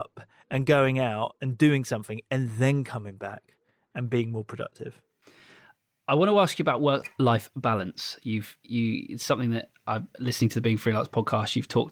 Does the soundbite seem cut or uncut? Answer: uncut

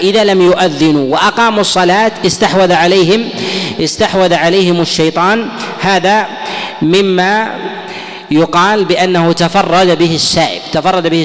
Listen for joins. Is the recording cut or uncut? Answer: uncut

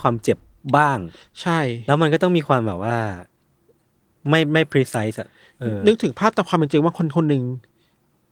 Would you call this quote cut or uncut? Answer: uncut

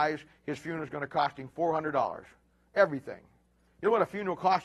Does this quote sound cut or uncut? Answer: uncut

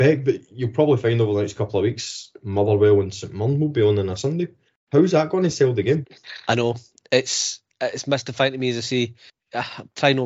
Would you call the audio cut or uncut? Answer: uncut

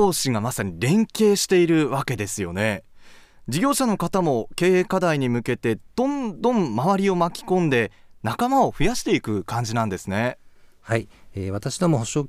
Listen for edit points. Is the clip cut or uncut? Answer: uncut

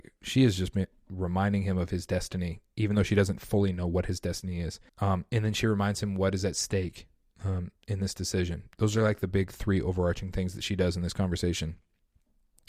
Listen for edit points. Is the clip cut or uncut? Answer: cut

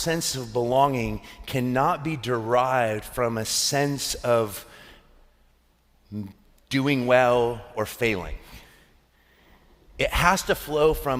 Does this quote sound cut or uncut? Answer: uncut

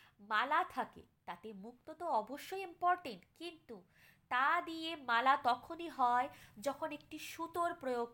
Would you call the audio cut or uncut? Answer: uncut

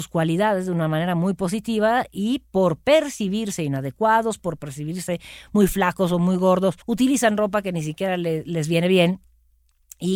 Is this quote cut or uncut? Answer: cut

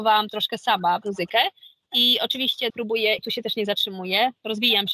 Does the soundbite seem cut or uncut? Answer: cut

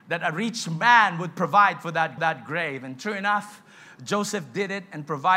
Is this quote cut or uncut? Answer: cut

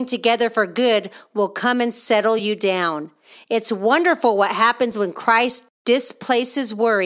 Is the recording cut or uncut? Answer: uncut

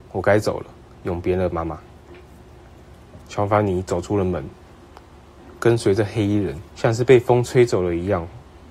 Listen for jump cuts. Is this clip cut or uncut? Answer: cut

